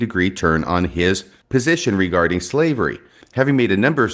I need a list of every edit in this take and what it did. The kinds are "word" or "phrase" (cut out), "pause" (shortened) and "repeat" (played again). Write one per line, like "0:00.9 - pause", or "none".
none